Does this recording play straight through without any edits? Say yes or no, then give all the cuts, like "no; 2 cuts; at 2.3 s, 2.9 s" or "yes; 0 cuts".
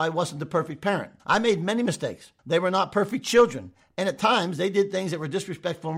no; 2 cuts; at 1.2 s, 2.4 s